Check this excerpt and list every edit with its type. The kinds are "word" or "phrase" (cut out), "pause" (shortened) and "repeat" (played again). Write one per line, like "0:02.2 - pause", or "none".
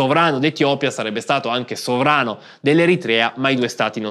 none